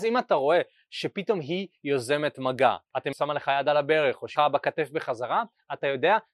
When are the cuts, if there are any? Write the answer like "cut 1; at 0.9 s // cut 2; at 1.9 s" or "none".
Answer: cut 1; at 3.1 s // cut 2; at 4.4 s